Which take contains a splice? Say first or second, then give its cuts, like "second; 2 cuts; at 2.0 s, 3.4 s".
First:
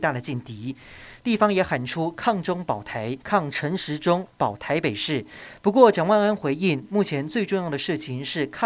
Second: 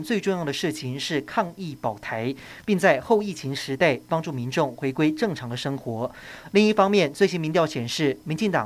first; 1 cut; at 3.2 s